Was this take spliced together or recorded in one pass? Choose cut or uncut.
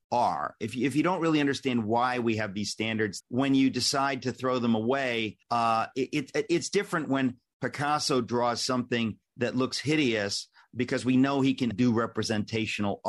cut